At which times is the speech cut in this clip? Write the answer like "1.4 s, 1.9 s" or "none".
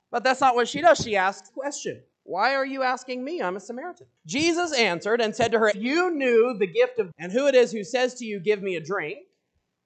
1.5 s, 2.1 s, 4.2 s, 5.7 s, 7.1 s